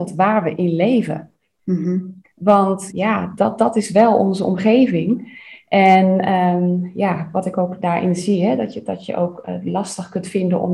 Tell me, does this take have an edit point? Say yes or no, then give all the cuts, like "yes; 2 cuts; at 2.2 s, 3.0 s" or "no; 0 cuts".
no; 0 cuts